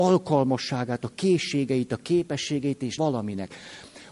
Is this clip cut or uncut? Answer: cut